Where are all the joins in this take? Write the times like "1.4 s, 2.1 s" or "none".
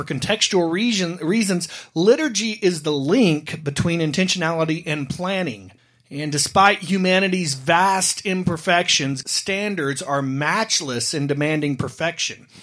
5.8 s, 9.2 s